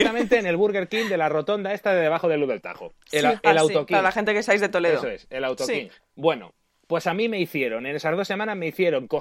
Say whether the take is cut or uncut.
cut